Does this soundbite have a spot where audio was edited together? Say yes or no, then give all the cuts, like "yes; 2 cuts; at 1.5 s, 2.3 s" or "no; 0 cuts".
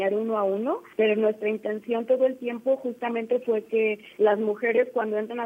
yes; 2 cuts; at 0.9 s, 4.1 s